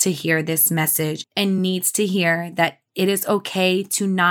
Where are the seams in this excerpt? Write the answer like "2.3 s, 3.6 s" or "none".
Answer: none